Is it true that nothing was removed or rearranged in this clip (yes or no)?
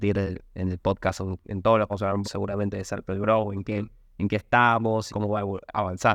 no